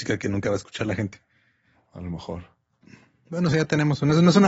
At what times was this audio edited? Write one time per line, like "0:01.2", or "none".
none

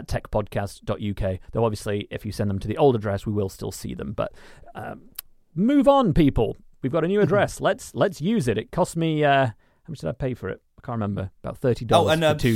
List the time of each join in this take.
none

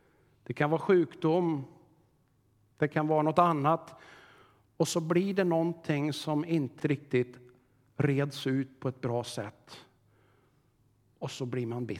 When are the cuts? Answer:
0:06.8

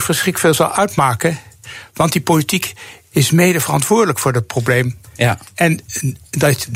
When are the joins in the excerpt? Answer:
none

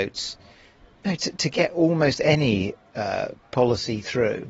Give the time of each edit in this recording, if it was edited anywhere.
none

